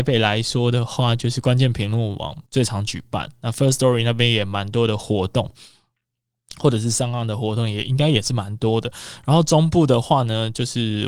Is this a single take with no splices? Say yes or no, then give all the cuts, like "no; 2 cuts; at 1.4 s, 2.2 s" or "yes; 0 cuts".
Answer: no; 1 cut; at 2.5 s